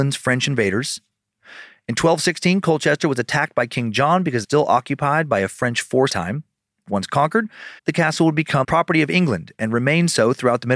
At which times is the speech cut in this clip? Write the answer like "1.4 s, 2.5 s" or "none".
4.4 s, 6.1 s, 7.8 s, 8.6 s